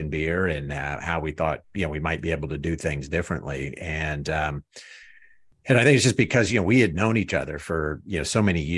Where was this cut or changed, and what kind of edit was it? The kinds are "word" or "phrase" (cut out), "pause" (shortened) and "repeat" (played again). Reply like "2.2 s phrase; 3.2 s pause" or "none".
none